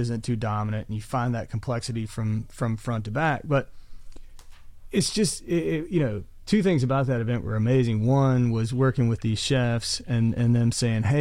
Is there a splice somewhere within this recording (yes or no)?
no